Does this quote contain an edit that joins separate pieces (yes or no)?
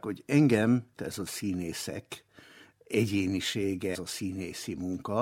yes